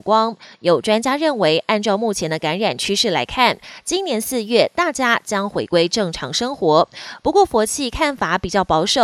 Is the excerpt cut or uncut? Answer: uncut